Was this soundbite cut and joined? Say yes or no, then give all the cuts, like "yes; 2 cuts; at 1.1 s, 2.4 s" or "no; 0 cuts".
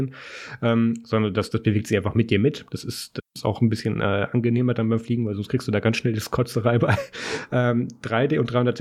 no; 0 cuts